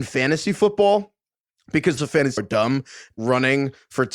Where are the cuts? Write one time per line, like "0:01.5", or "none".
0:02.0
0:02.4
0:03.1